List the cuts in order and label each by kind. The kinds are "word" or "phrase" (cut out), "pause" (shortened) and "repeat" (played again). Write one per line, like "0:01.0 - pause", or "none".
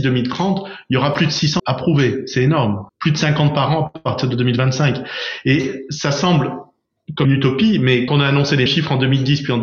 0:01.6 - phrase
0:02.9 - pause
0:07.2 - word
0:08.1 - word
0:08.7 - word